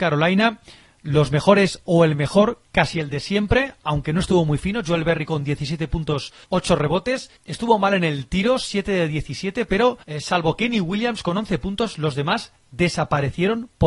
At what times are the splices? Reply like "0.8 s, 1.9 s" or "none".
6.4 s, 7.4 s, 10.0 s